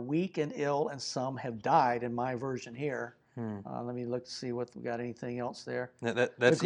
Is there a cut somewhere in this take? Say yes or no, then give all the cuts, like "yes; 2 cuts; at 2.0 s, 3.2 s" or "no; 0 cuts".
no; 0 cuts